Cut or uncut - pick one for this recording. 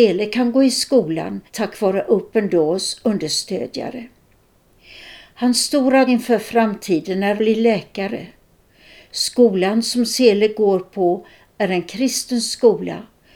cut